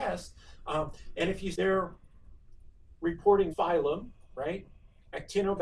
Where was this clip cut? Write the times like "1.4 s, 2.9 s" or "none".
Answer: 1.5 s, 3.5 s